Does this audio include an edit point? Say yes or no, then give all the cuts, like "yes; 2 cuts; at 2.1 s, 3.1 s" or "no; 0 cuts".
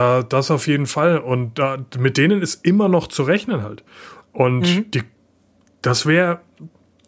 no; 0 cuts